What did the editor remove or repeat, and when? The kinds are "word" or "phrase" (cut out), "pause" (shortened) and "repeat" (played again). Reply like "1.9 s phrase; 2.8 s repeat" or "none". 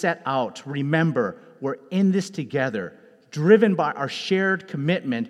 none